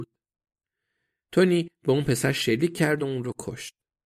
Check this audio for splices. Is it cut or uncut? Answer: uncut